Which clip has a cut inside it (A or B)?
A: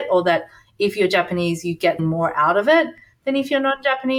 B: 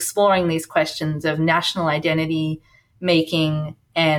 A